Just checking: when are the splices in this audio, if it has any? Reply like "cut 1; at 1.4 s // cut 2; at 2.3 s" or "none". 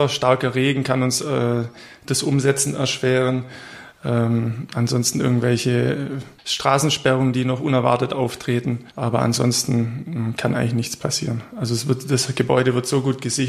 cut 1; at 6.4 s // cut 2; at 8.9 s

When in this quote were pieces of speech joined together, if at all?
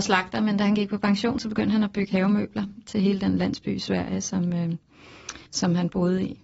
cut 1; at 5.5 s

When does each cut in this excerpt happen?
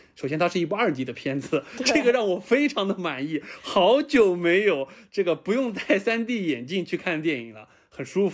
none

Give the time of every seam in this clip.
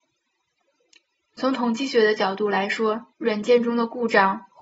cut 1; at 3.1 s

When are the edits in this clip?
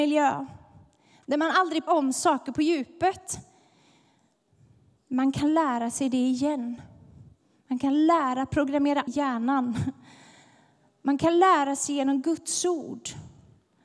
cut 1; at 1.9 s // cut 2; at 9.1 s

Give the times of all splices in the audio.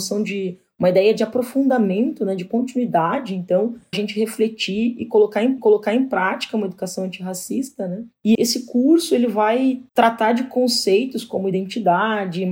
cut 1; at 3.9 s // cut 2; at 5.6 s // cut 3; at 8.3 s // cut 4; at 9.9 s

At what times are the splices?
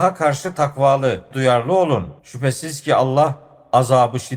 cut 1; at 1.3 s // cut 2; at 2.2 s

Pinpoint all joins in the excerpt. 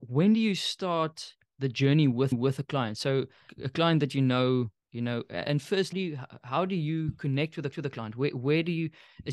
cut 1; at 2.3 s // cut 2; at 3.5 s // cut 3; at 4.8 s // cut 4; at 5.9 s // cut 5; at 7.7 s

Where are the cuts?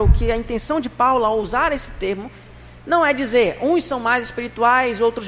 none

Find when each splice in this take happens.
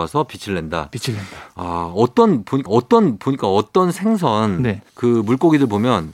cut 1; at 2.7 s // cut 2; at 4.9 s

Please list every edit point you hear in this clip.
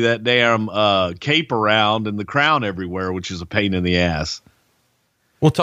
none

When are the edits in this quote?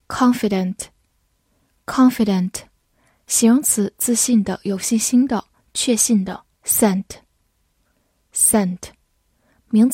cut 1; at 6.5 s

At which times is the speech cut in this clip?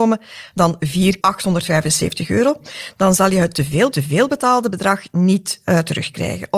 cut 1; at 1.2 s // cut 2; at 3.9 s

